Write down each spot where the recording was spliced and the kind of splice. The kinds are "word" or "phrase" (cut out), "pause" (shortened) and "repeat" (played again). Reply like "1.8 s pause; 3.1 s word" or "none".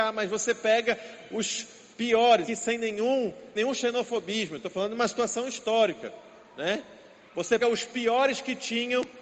2.5 s word; 3.6 s word; 7.6 s word